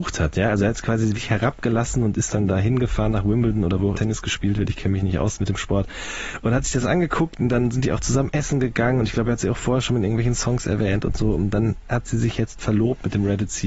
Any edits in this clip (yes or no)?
yes